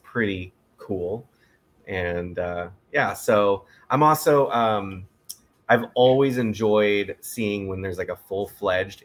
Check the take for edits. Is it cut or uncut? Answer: uncut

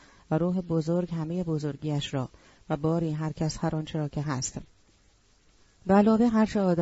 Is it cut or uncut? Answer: uncut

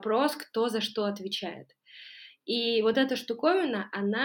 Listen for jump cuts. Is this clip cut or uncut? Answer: uncut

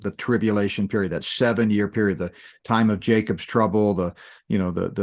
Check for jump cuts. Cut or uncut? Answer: uncut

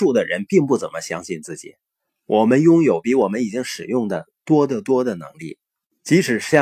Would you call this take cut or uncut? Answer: uncut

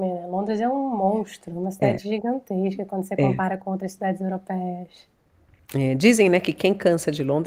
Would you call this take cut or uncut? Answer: uncut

